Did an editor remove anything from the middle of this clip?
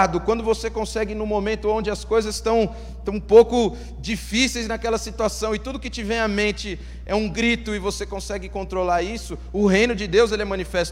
no; 0 cuts

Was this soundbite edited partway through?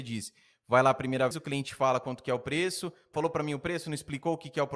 yes; 2 cuts; at 1.3 s, 3.1 s

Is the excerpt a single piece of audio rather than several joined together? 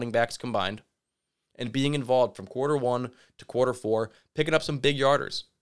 yes; 0 cuts

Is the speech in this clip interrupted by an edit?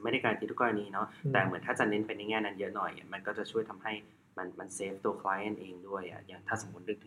no; 0 cuts

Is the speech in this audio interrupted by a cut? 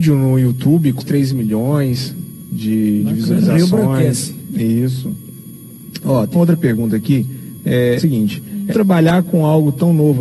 yes; 4 cuts; at 1.0 s, 6.3 s, 8.0 s, 8.7 s

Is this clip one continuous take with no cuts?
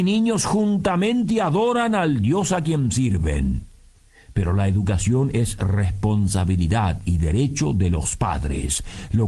yes; 0 cuts

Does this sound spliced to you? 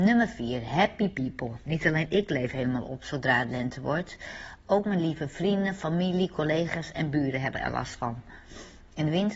no; 0 cuts

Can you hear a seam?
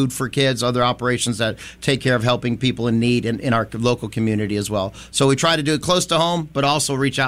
no; 0 cuts

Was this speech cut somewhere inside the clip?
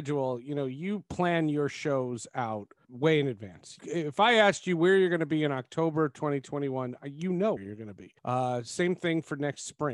yes; 4 cuts; at 2.8 s, 3.8 s, 7.6 s, 8.2 s

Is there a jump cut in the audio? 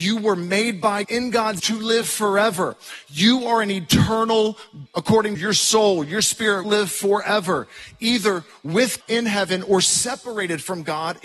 yes; 6 cuts; at 1.0 s, 1.6 s, 4.9 s, 5.4 s, 6.6 s, 9.0 s

